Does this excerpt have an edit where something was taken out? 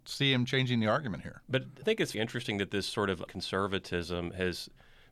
yes; 3 cuts; at 1.8 s, 2.1 s, 3.3 s

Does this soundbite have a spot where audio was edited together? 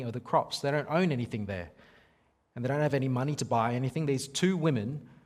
no; 0 cuts

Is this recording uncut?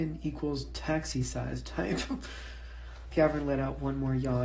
no; 1 cut; at 3.1 s

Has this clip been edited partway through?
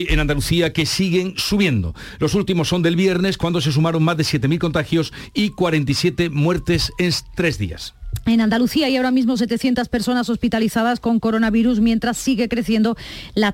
no; 0 cuts

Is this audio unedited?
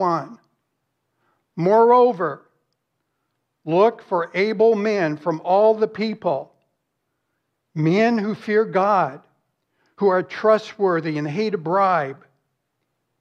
yes; 0 cuts

